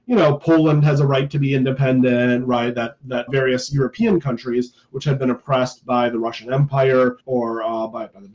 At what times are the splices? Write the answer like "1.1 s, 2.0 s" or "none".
3.3 s, 7.2 s